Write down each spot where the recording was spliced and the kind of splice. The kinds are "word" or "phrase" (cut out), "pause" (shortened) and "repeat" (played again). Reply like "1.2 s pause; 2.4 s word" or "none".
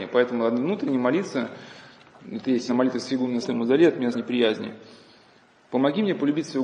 2.2 s word; 2.7 s word; 3.4 s phrase; 4.1 s word